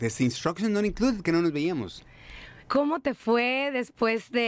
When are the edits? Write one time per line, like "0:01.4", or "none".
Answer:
0:02.6